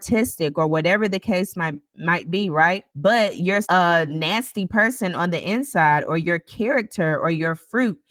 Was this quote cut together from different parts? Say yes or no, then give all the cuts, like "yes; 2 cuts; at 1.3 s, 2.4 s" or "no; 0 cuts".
yes; 2 cuts; at 2.9 s, 3.6 s